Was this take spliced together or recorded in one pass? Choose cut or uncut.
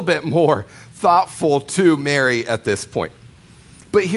uncut